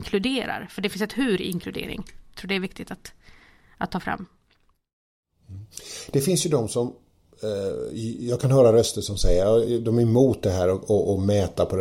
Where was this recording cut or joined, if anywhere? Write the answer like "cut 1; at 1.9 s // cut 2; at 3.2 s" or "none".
none